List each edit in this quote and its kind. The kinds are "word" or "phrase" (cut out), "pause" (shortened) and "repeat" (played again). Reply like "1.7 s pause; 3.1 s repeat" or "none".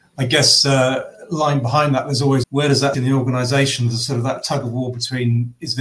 2.4 s phrase; 2.9 s word

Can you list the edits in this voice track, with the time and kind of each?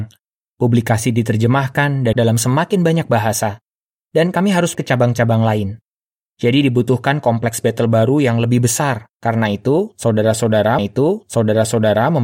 2.1 s word; 4.7 s word; 9.1 s pause; 10.8 s repeat

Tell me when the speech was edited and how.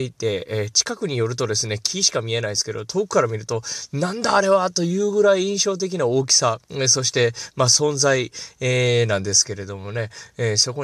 6.6 s pause

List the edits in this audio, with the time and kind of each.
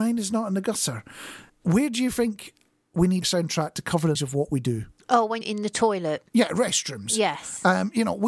1.5 s pause; 2.7 s pause; 3.2 s word; 4.1 s word; 5.4 s word

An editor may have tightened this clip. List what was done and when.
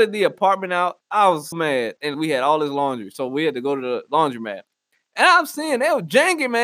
1.5 s word; 2.1 s word

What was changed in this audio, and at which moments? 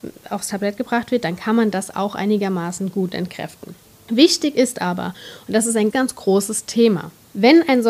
5.9 s word

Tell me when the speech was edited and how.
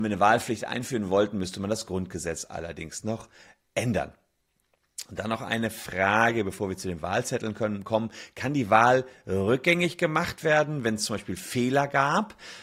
none

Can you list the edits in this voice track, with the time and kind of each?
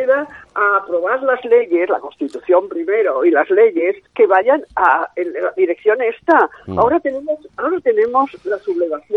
4.1 s pause

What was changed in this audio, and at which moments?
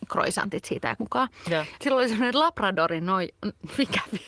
1.0 s word; 1.8 s word

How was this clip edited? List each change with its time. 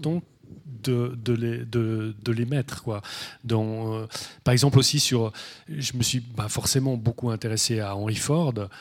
none

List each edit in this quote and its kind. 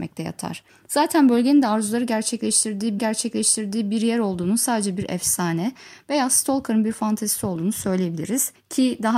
3.0 s repeat

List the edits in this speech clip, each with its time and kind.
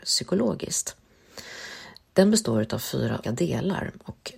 3.2 s word

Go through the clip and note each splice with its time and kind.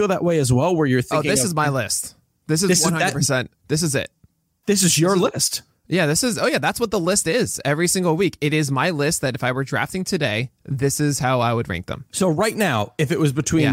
3.6 s pause; 12.1 s pause

